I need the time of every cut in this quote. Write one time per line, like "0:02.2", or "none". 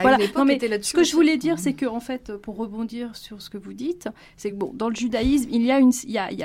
none